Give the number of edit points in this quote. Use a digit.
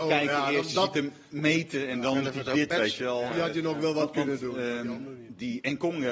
0